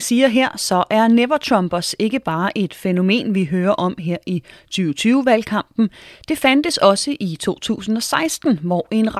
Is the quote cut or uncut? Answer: uncut